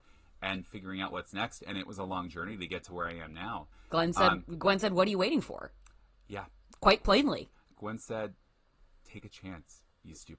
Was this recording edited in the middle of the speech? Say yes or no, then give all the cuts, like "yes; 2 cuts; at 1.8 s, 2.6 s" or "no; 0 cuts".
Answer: no; 0 cuts